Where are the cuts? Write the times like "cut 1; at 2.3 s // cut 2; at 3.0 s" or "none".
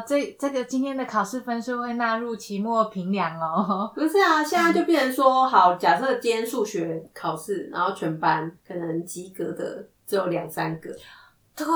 cut 1; at 8.6 s // cut 2; at 9.9 s